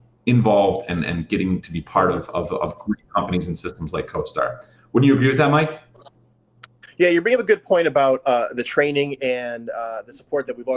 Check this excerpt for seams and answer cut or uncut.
uncut